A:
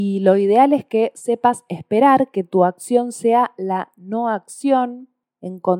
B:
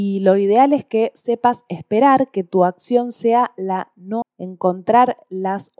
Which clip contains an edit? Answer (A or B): B